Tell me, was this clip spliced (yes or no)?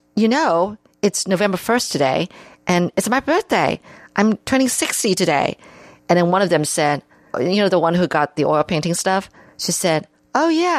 no